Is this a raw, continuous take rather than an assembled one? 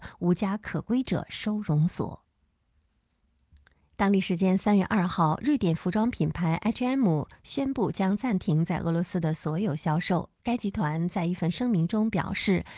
yes; 0 cuts

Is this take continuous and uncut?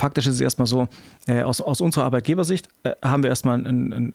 yes; 0 cuts

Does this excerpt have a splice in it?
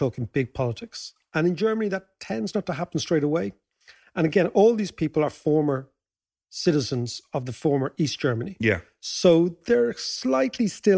no; 0 cuts

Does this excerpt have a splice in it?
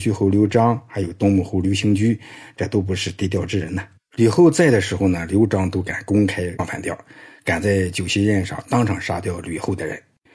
no; 0 cuts

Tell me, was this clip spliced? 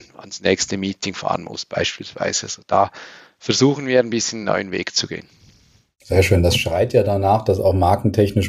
no; 0 cuts

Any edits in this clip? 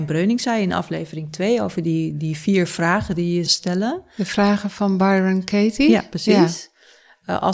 yes; 1 cut; at 3.5 s

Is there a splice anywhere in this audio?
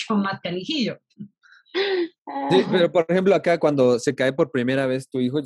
no; 0 cuts

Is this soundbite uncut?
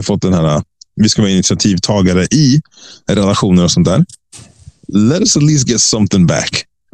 yes; 0 cuts

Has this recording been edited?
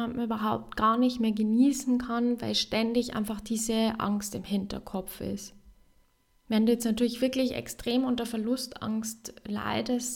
no; 0 cuts

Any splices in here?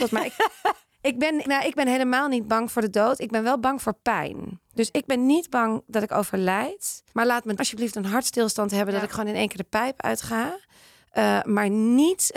yes; 3 cuts; at 1.4 s, 7.1 s, 7.6 s

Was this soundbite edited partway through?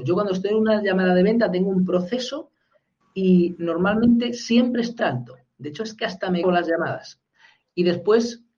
yes; 2 cuts; at 5.0 s, 6.4 s

